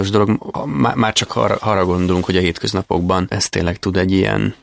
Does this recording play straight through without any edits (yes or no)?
yes